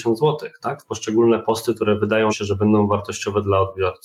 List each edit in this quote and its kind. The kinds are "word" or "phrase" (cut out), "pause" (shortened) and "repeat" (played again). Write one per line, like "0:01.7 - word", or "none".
0:02.3 - word

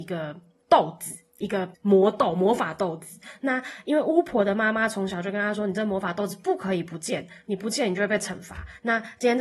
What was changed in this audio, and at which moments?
0:01.7 - pause

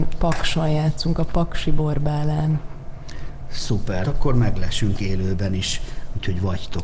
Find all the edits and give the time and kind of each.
0:04.0 - word

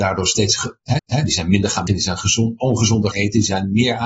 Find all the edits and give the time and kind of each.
0:01.0 - repeat
0:01.9 - word
0:03.1 - word

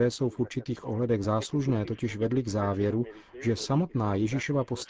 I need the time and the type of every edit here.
none

